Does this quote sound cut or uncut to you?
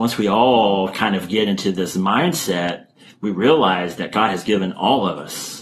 uncut